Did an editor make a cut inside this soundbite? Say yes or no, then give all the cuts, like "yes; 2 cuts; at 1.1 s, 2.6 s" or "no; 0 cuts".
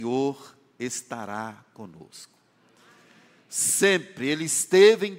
no; 0 cuts